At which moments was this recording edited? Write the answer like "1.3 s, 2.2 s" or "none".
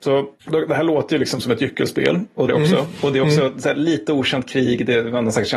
2.5 s